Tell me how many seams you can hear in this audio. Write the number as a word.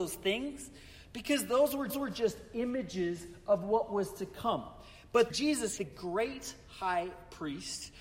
three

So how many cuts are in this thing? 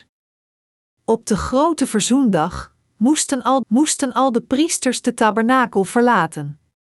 one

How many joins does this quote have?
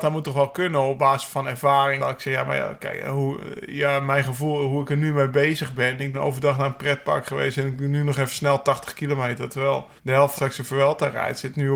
five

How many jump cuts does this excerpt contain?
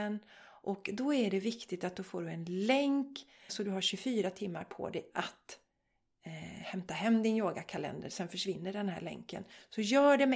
one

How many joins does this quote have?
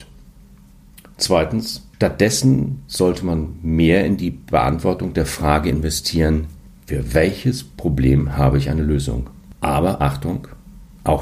one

